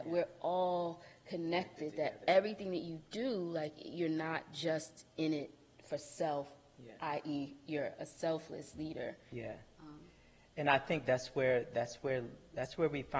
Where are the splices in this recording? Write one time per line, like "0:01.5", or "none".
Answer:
none

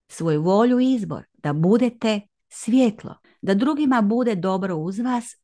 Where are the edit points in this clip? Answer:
0:01.3
0:03.2

